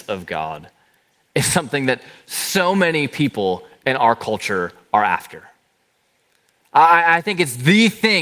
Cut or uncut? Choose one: uncut